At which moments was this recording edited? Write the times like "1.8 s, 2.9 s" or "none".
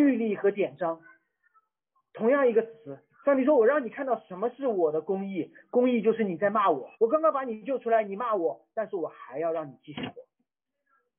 3.1 s, 6.9 s